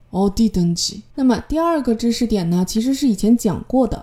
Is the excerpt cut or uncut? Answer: cut